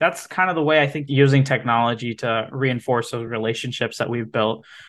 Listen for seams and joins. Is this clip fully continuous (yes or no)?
yes